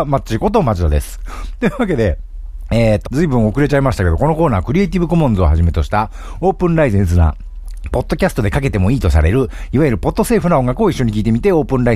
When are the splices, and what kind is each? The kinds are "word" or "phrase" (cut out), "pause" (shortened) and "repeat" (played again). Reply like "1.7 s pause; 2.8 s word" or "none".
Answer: 3.0 s word